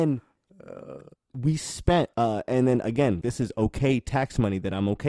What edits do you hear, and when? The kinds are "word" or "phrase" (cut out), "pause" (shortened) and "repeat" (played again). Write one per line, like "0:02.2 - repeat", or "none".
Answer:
0:01.1 - word
0:02.1 - pause
0:03.2 - word